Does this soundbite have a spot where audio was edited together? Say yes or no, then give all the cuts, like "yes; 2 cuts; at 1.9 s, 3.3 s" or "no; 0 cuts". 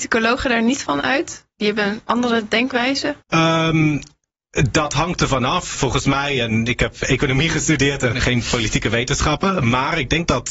yes; 3 cuts; at 3.2 s, 5.7 s, 8.1 s